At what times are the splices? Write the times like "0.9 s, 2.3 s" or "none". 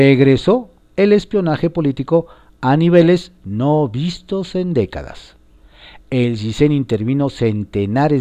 none